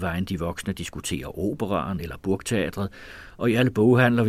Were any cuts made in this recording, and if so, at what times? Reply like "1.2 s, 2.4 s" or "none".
none